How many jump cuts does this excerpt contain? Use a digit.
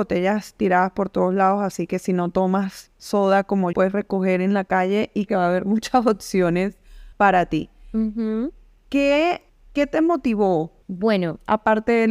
5